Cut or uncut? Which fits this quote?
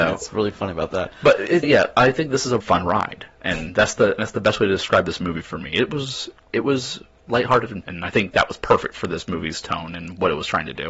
cut